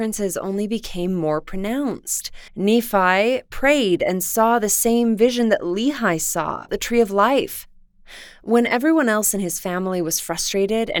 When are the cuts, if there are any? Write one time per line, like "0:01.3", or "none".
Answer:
0:02.5
0:06.7